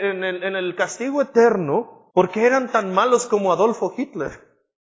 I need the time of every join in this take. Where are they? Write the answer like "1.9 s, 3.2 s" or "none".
2.1 s